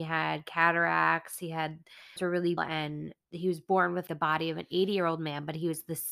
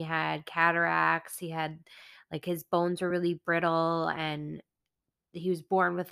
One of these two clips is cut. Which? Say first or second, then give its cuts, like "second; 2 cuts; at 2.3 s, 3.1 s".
first; 4 cuts; at 2.2 s, 2.6 s, 3.2 s, 4.1 s